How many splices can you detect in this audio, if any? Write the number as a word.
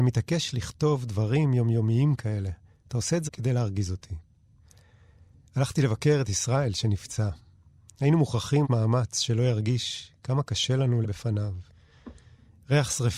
three